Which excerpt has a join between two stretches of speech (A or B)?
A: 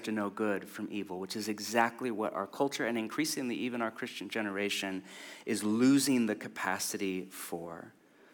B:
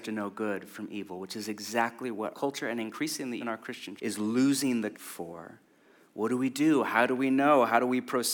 B